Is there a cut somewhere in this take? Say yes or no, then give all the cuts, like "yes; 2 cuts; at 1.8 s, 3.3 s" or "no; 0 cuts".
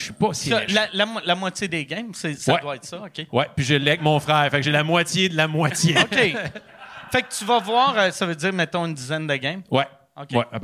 no; 0 cuts